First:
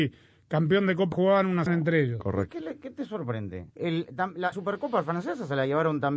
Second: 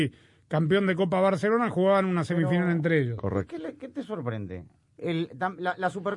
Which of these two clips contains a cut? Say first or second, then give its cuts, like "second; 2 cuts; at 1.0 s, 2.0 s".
first; 4 cuts; at 1.1 s, 1.7 s, 3.7 s, 4.5 s